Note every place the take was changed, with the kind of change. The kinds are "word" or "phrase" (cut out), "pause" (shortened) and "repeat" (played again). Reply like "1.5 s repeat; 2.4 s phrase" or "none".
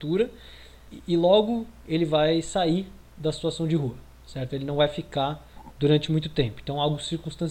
none